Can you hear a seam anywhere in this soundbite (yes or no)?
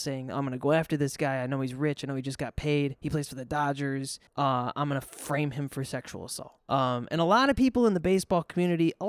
no